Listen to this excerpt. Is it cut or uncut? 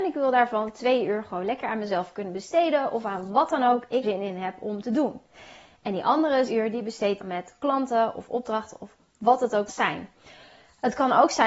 cut